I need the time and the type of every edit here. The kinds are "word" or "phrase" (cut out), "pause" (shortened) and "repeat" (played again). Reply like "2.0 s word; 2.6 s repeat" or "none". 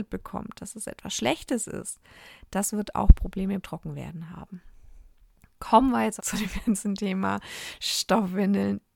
3.6 s word; 5.2 s pause; 6.2 s phrase